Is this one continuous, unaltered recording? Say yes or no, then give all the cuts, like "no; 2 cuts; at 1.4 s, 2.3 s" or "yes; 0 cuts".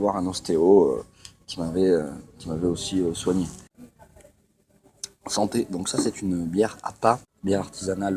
yes; 0 cuts